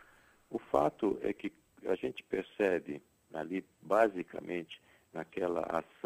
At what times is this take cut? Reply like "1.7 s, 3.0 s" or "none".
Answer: none